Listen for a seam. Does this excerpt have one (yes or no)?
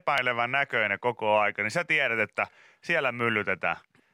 no